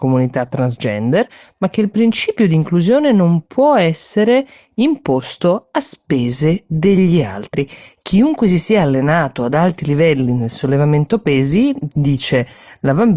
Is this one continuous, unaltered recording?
yes; 0 cuts

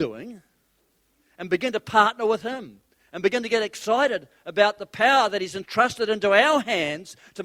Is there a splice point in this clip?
no; 0 cuts

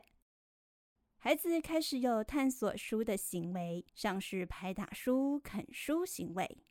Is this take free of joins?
no; 1 cut; at 3.9 s

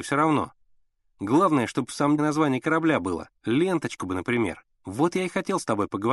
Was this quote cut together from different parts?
yes; 3 cuts; at 2.2 s, 3.4 s, 4.7 s

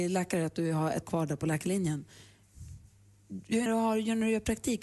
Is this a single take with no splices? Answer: no; 2 cuts; at 1.0 s, 3.7 s

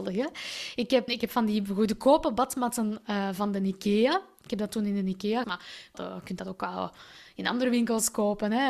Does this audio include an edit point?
yes; 3 cuts; at 1.1 s, 5.4 s, 5.9 s

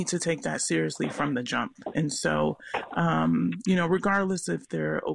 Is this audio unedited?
yes; 0 cuts

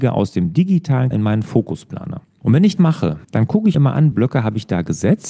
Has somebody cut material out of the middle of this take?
yes; 6 cuts; at 1.1 s, 2.2 s, 2.8 s, 3.2 s, 3.7 s, 4.1 s

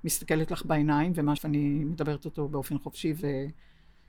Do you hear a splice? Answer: yes; 1 cut; at 1.4 s

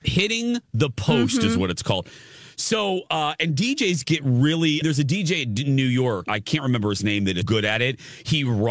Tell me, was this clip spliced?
yes; 3 cuts; at 4.8 s, 6.2 s, 7.4 s

